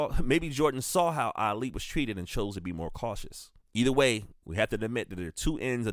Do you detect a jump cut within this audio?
yes; 1 cut; at 3.6 s

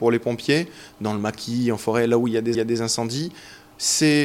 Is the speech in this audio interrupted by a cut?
yes; 1 cut; at 2.5 s

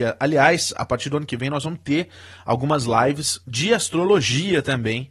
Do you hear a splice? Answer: yes; 1 cut; at 3.4 s

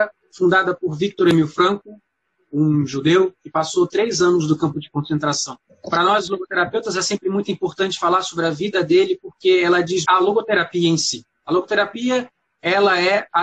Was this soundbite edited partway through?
yes; 2 cuts; at 5.7 s, 10.0 s

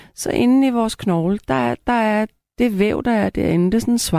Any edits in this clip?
no; 0 cuts

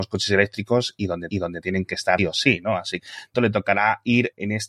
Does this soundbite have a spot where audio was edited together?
yes; 4 cuts; at 1.3 s, 2.2 s, 3.0 s, 3.3 s

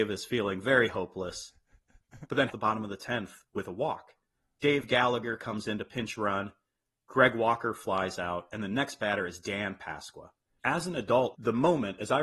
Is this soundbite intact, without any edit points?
no; 1 cut; at 2.5 s

